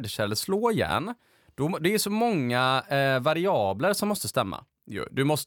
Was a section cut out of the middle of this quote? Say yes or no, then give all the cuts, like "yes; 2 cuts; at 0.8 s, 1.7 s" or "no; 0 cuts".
no; 0 cuts